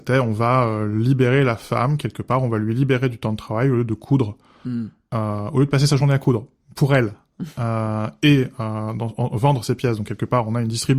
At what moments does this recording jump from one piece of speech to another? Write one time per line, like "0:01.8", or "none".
none